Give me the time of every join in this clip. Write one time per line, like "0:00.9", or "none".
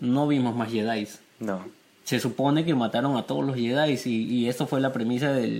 none

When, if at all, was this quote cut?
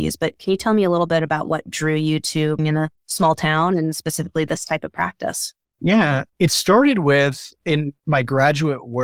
0:02.6
0:03.0
0:07.6

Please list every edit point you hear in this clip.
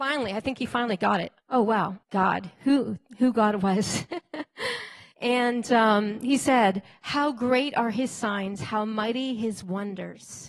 0:01.4
0:02.0
0:05.1

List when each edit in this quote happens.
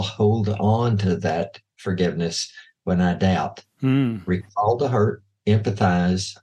none

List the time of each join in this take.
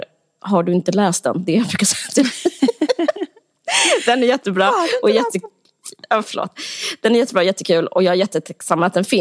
none

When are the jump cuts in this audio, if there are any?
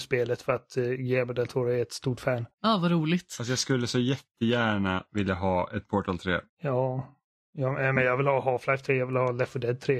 0:02.5
0:06.5

